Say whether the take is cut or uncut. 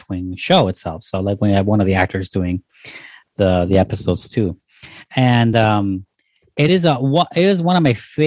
uncut